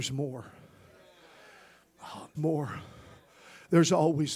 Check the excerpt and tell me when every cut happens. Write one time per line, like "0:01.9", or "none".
0:02.3